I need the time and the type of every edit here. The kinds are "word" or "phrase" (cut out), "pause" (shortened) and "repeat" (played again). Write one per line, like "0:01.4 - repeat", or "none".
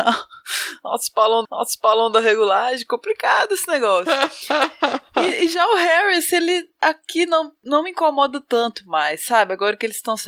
0:01.4 - repeat